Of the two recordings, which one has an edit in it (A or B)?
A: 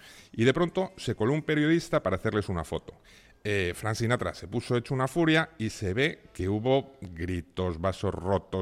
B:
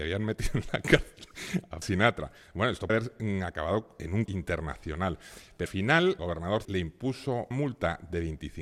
B